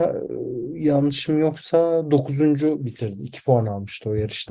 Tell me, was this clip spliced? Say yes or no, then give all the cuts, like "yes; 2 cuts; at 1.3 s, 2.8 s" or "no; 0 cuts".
no; 0 cuts